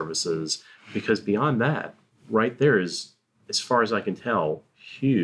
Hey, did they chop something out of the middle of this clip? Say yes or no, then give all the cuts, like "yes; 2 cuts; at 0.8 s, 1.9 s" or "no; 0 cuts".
yes; 1 cut; at 2.1 s